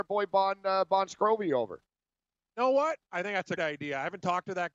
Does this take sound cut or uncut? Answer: cut